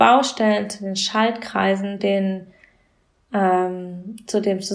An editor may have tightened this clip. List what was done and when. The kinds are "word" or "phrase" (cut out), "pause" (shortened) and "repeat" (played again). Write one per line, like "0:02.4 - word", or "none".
0:02.0 - word